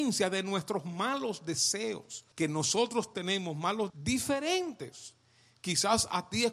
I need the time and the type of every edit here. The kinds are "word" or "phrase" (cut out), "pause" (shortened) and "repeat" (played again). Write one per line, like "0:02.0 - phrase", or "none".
0:02.3 - pause
0:03.1 - word
0:03.9 - word